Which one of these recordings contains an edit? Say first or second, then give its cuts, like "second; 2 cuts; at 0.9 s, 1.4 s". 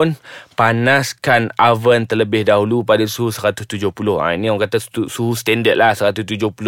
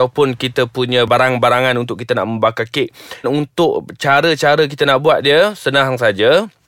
second; 1 cut; at 3.2 s